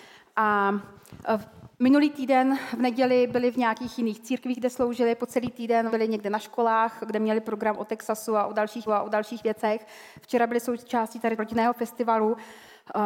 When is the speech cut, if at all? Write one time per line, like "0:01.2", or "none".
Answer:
0:01.7
0:05.9
0:08.9
0:11.4